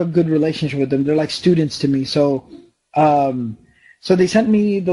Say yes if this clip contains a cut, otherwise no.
no